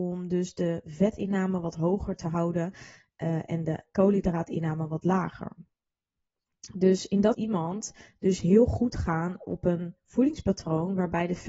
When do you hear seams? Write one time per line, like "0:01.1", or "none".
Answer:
0:07.3